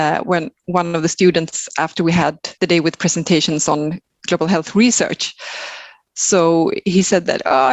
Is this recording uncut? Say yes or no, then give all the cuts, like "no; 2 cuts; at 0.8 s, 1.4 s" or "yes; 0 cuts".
no; 1 cut; at 2.6 s